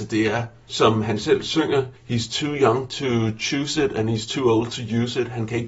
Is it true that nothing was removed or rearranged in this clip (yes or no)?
no